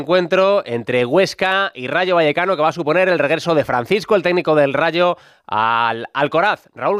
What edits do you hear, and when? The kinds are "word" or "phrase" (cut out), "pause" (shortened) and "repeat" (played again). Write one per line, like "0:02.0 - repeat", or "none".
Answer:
none